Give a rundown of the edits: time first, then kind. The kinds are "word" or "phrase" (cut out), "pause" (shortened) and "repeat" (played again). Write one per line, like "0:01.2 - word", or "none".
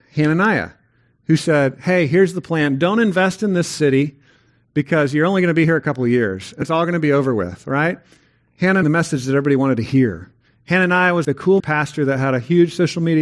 0:06.6 - word
0:08.8 - phrase
0:11.2 - word
0:11.6 - word